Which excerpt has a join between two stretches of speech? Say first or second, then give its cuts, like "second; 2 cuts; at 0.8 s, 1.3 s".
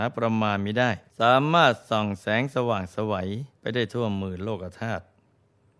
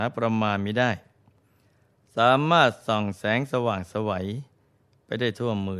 first; 2 cuts; at 1.1 s, 3.6 s